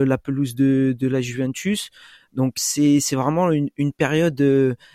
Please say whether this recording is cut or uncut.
cut